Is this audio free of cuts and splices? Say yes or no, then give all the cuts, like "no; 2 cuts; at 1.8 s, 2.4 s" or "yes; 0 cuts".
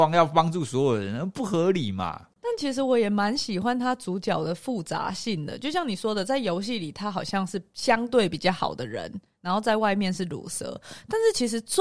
no; 1 cut; at 2.4 s